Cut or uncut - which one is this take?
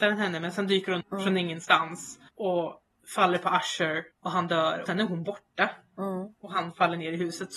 cut